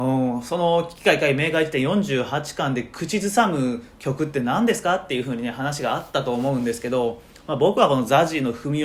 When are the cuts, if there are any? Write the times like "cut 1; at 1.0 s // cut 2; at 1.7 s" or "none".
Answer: none